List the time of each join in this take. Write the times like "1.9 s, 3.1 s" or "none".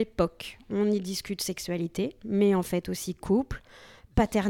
none